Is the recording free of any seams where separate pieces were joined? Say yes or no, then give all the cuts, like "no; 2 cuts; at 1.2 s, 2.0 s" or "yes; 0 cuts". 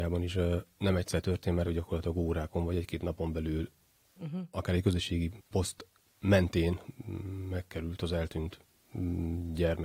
no; 2 cuts; at 1.6 s, 5.4 s